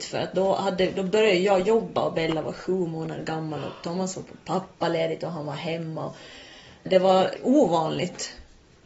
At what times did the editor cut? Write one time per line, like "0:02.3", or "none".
none